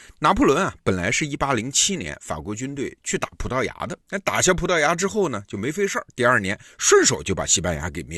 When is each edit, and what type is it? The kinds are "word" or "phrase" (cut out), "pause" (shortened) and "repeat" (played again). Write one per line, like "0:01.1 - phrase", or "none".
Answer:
0:04.0 - pause